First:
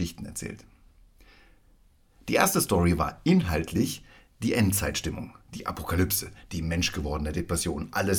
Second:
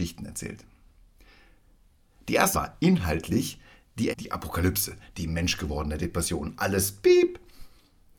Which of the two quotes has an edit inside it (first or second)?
second